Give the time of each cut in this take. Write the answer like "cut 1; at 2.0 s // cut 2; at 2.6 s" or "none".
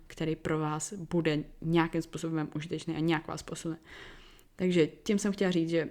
none